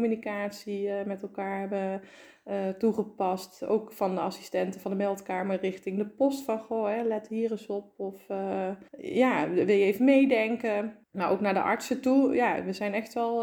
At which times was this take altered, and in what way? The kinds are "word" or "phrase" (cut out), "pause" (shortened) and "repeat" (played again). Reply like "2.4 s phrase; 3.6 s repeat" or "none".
8.9 s pause; 11.0 s pause